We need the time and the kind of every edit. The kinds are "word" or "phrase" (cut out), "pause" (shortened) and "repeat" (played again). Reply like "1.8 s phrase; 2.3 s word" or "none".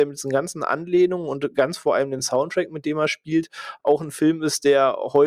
none

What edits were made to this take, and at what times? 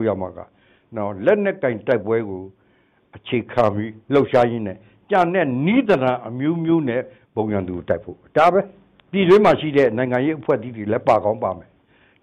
4.0 s pause

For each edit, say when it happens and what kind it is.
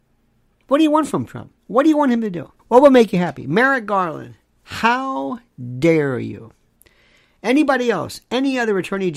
2.6 s pause

